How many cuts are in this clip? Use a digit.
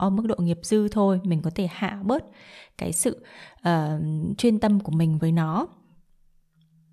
1